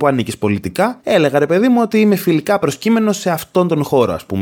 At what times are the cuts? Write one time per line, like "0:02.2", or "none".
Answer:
none

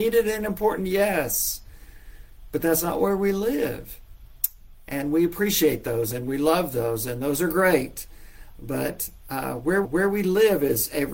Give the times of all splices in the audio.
0:09.8

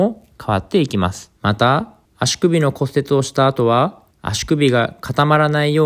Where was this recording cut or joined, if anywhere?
0:01.4
0:02.1
0:04.1

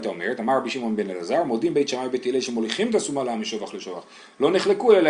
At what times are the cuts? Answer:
none

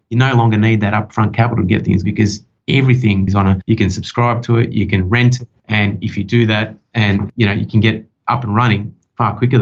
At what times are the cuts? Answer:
0:02.0
0:03.3

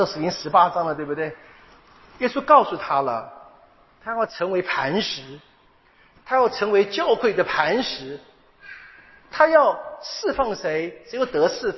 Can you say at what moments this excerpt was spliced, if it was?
none

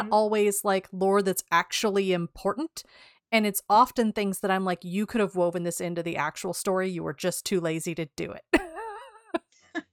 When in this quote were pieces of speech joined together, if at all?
none

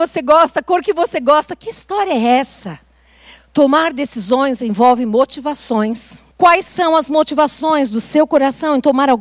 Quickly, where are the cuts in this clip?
0:06.3

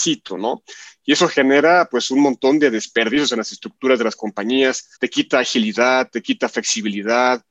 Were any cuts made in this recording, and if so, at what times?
0:05.0

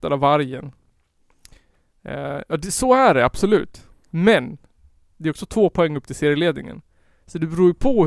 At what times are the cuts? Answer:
none

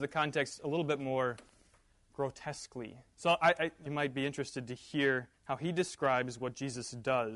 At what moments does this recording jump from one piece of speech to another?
0:03.9
0:05.3

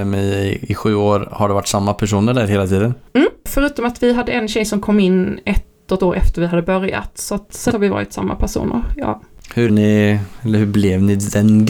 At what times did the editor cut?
0:06.0
0:07.7
0:09.7

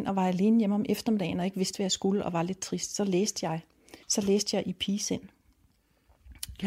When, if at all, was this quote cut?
0:04.0

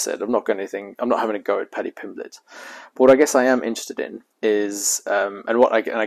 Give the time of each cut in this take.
0:04.3

